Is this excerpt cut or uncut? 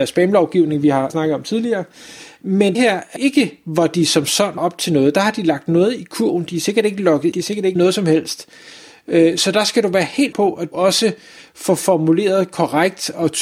cut